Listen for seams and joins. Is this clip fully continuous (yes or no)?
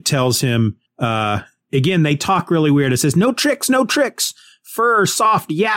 yes